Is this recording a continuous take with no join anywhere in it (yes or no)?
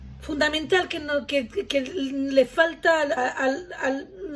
no